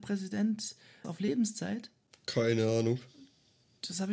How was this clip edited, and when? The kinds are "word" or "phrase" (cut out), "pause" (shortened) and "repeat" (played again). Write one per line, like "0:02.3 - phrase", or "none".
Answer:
0:01.0 - word